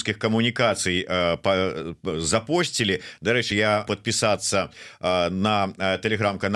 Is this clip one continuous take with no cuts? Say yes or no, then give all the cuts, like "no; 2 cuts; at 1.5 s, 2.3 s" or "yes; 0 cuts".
no; 2 cuts; at 3.5 s, 3.9 s